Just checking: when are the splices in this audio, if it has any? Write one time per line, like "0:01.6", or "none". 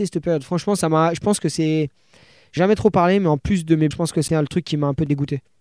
0:02.6
0:03.9
0:04.3